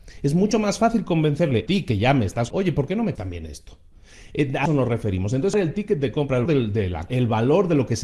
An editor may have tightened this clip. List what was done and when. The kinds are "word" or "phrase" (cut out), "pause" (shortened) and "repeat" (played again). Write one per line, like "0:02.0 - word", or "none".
0:01.7 - word
0:02.5 - word
0:03.2 - word
0:04.7 - word
0:05.5 - word
0:06.5 - word
0:07.1 - word